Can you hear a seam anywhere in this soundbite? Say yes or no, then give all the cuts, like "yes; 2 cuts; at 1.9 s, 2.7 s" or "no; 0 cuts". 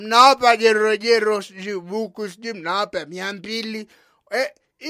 no; 0 cuts